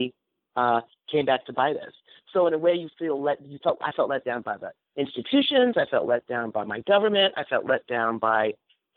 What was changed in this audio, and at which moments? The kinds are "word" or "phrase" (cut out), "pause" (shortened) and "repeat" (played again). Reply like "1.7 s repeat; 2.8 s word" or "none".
none

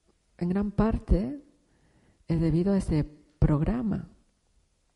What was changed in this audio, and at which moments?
none

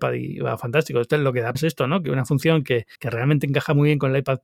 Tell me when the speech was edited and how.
1.5 s word; 2.9 s pause

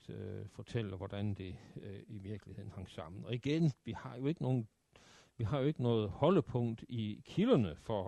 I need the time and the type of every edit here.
none

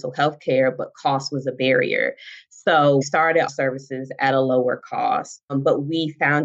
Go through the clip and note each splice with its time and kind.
3.0 s word; 3.5 s phrase

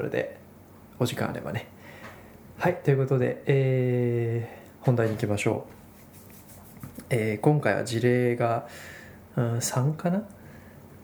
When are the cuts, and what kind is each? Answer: 4.7 s pause

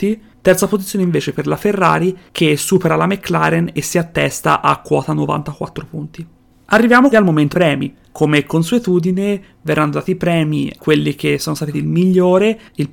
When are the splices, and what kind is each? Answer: 7.1 s word; 7.5 s word; 10.8 s word; 11.7 s word

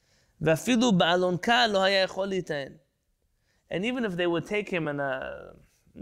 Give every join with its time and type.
none

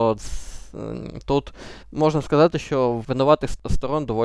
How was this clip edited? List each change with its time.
1.8 s pause

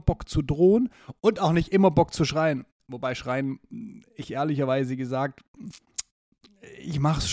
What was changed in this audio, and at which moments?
none

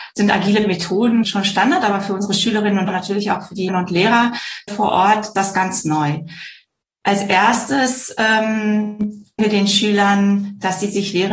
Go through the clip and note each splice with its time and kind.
1.2 s word; 2.9 s word; 3.7 s word; 4.7 s word; 5.3 s word; 9.4 s word

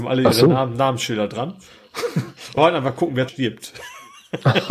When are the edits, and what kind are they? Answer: 2.6 s word; 3.3 s word

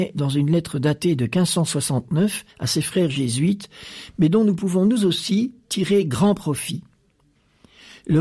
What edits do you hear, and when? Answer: 2.5 s pause

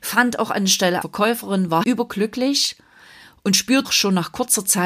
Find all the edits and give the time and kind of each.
1.0 s word; 1.8 s word; 3.8 s word

